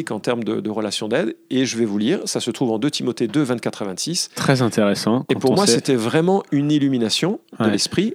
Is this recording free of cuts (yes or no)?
yes